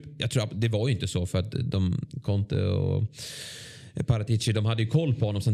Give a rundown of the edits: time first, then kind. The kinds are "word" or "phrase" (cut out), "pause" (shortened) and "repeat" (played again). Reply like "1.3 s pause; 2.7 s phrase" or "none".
none